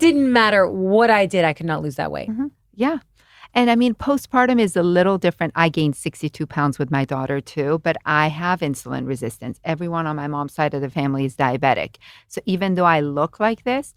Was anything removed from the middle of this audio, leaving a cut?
no; 0 cuts

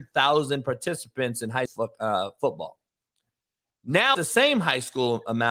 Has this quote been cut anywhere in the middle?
yes; 2 cuts; at 1.7 s, 4.1 s

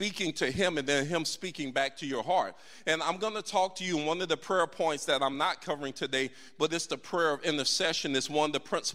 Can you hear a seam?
no; 0 cuts

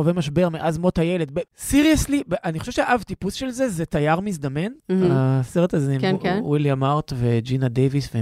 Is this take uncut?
no; 2 cuts; at 1.5 s, 4.8 s

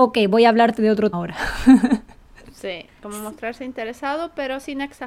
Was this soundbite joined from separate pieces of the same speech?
yes; 2 cuts; at 1.1 s, 2.9 s

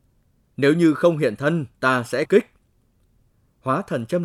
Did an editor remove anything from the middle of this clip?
yes; 1 cut; at 2.3 s

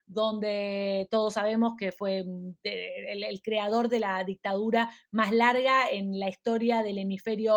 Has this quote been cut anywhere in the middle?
no; 0 cuts

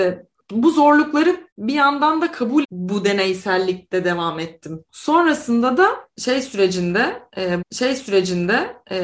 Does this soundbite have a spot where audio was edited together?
yes; 4 cuts; at 1.5 s, 2.6 s, 4.9 s, 7.6 s

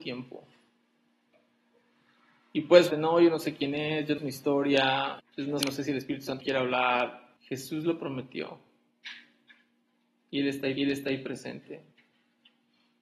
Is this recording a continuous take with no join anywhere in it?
no; 7 cuts; at 2.9 s, 4.2 s, 5.2 s, 5.6 s, 6.4 s, 7.4 s, 10.8 s

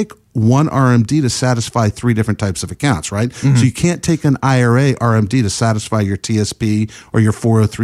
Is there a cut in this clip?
no; 0 cuts

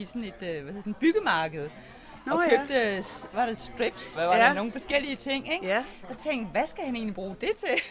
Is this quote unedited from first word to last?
no; 2 cuts; at 4.2 s, 6.2 s

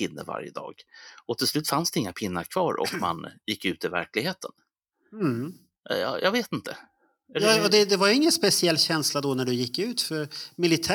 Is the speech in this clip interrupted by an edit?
no; 0 cuts

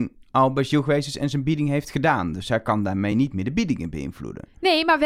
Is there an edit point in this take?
no; 0 cuts

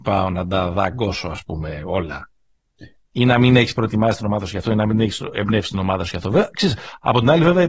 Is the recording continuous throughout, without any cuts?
no; 1 cut; at 3.1 s

